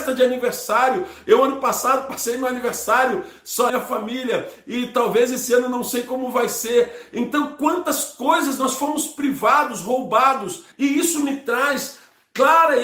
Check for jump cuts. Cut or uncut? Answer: cut